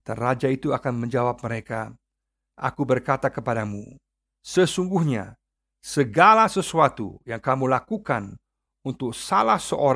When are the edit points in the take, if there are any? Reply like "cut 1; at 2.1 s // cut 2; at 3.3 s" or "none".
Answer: none